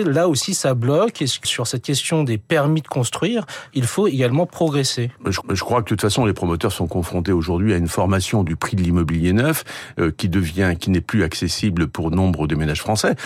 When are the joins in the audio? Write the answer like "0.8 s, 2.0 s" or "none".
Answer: 1.4 s, 5.4 s